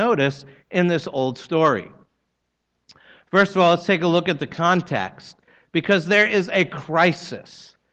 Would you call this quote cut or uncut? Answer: uncut